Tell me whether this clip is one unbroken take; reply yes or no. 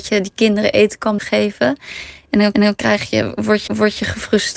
no